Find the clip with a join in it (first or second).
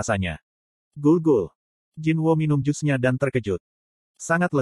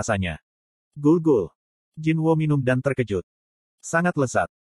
second